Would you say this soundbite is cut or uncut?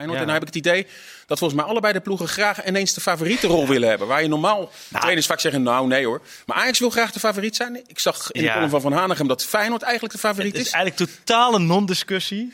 uncut